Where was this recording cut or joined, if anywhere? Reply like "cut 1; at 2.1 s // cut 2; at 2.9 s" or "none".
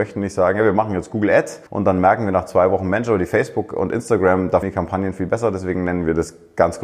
cut 1; at 1.7 s // cut 2; at 4.6 s